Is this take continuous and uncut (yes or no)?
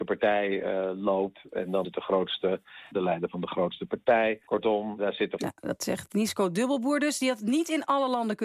no